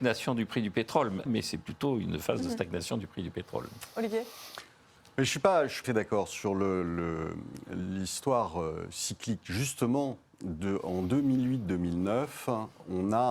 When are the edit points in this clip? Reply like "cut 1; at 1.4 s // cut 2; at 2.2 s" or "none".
cut 1; at 1.3 s // cut 2; at 5.8 s